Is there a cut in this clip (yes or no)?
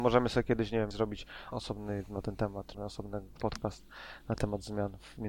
yes